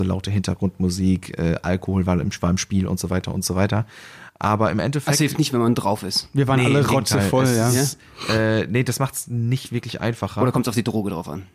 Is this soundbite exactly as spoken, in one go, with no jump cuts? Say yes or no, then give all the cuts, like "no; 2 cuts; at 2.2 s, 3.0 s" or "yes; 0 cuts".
yes; 0 cuts